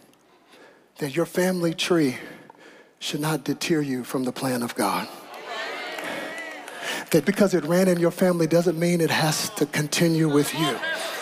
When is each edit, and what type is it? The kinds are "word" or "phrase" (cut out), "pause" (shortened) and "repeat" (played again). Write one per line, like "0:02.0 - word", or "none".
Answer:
0:07.2 - word

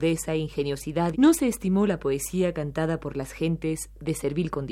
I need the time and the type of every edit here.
0:01.1 - phrase

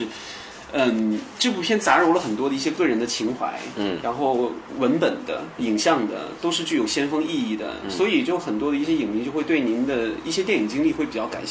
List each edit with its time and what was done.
0:05.6 - word

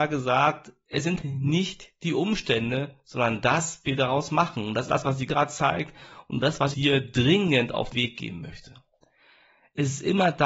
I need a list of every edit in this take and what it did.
0:01.2 - word
0:03.8 - word
0:04.9 - word
0:05.3 - word
0:06.7 - word
0:07.9 - word

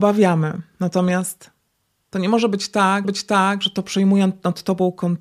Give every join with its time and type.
0:03.0 - repeat

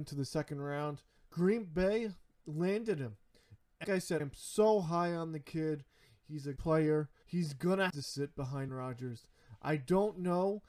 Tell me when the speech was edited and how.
0:01.2 - word
0:03.8 - word
0:04.2 - word
0:06.6 - word
0:07.2 - word
0:07.9 - word
0:08.7 - word

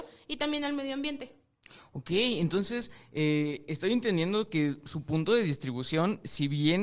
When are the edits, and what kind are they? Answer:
none

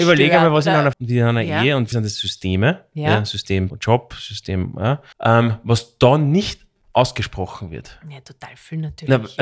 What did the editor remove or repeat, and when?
0:00.9 - word
0:01.9 - word
0:03.7 - phrase
0:05.1 - pause

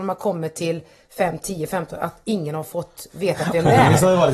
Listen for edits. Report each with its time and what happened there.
none

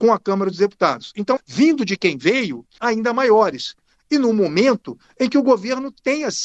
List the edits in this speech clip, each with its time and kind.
0:01.4 - word
0:02.8 - phrase

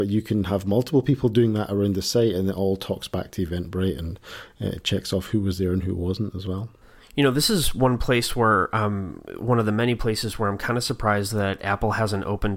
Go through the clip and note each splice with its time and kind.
none

